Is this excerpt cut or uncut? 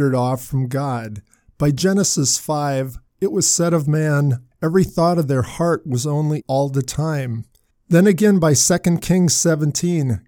cut